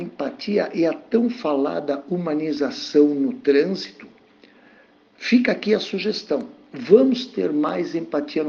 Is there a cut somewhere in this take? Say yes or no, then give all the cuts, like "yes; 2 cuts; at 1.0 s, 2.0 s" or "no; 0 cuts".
no; 0 cuts